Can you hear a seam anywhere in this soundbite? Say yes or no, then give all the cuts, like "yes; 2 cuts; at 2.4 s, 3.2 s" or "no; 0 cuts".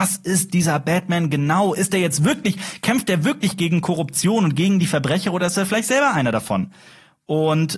no; 0 cuts